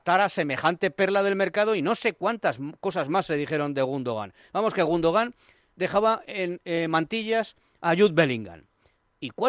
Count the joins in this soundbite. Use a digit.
0